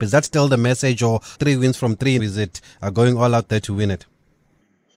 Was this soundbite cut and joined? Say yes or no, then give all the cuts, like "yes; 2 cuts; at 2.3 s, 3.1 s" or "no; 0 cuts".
yes; 2 cuts; at 1.3 s, 2.2 s